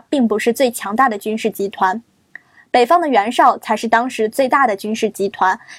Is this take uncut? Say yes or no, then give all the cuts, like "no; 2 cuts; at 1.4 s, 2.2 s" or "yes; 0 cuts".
yes; 0 cuts